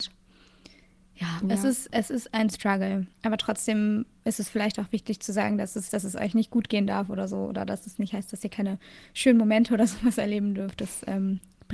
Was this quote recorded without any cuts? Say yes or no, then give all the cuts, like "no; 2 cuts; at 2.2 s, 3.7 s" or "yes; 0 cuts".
no; 2 cuts; at 3.1 s, 5.9 s